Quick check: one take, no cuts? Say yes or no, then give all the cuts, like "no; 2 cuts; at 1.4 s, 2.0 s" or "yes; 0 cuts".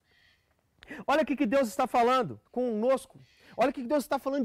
no; 1 cut; at 2.5 s